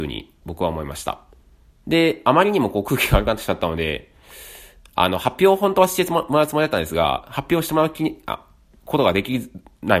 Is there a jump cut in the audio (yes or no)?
no